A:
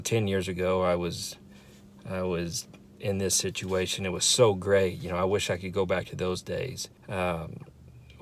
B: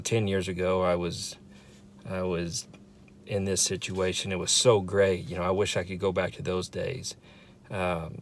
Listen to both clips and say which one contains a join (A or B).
A